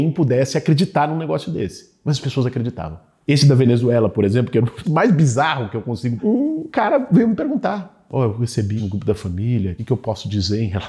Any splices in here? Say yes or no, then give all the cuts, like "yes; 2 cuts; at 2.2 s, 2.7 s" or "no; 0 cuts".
yes; 3 cuts; at 4.8 s, 6.2 s, 8.8 s